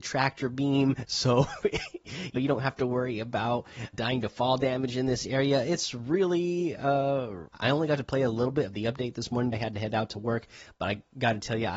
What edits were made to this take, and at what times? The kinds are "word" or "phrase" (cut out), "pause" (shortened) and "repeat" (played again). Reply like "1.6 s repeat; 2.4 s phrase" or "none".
2.4 s word; 3.9 s word; 7.5 s phrase; 9.5 s word